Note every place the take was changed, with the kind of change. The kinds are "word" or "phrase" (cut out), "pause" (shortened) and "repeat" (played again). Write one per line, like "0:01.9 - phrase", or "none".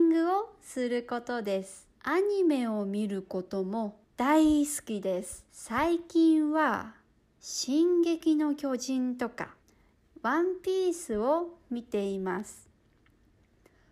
0:02.0 - pause
0:04.0 - pause
0:05.5 - pause
0:09.6 - pause